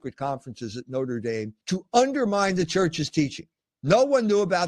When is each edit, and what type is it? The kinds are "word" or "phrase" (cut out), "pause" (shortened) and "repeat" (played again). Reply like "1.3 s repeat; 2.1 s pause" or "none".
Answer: 1.6 s pause